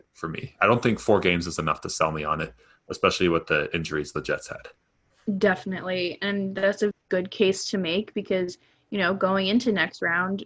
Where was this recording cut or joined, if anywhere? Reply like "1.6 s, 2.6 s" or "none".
6.9 s